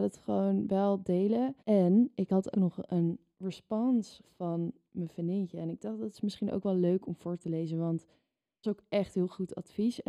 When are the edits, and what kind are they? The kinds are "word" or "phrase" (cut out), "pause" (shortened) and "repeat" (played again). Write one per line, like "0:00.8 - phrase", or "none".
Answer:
0:01.6 - pause
0:02.5 - word
0:04.2 - word
0:08.6 - phrase